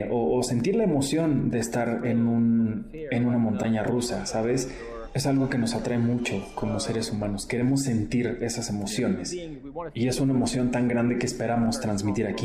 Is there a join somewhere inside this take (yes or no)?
no